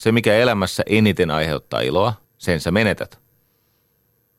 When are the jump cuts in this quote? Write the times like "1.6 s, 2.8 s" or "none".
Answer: 2.2 s